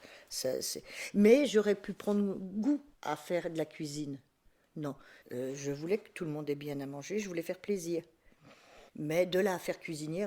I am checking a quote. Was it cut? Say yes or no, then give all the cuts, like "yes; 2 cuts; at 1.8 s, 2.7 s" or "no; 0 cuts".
yes; 3 cuts; at 2.9 s, 5.2 s, 8.9 s